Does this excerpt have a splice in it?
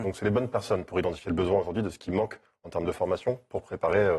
no; 0 cuts

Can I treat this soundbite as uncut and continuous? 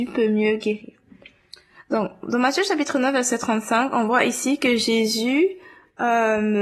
yes; 0 cuts

